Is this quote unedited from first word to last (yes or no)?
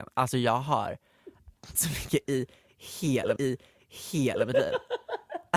no